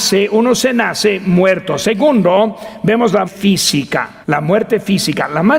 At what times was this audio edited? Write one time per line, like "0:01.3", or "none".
0:03.2
0:04.2